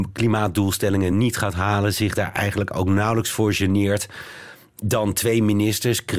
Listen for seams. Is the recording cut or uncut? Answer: uncut